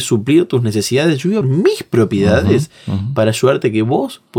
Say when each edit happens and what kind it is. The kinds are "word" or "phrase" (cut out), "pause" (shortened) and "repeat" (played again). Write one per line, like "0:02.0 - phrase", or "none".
0:01.4 - word